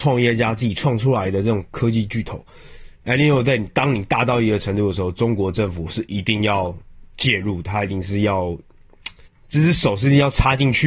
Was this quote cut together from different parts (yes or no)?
yes